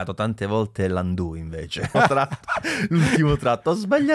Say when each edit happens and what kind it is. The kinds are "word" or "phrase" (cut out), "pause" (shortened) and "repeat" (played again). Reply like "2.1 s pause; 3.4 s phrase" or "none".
1.9 s word